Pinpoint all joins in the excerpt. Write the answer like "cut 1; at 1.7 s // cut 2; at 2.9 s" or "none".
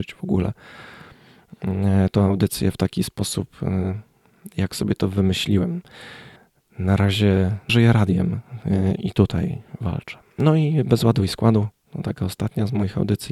cut 1; at 6.4 s // cut 2; at 7.7 s // cut 3; at 9.0 s